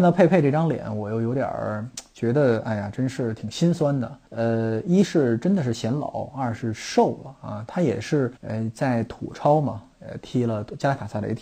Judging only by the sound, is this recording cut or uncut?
cut